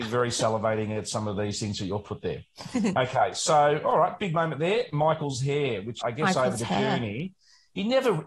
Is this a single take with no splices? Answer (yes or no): no